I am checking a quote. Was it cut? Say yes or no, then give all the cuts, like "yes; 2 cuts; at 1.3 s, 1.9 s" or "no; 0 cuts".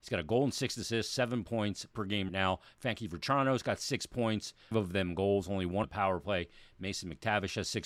yes; 4 cuts; at 1.9 s, 2.3 s, 4.7 s, 5.8 s